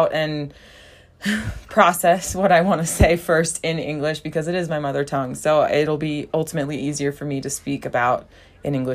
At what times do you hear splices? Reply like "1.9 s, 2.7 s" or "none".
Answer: none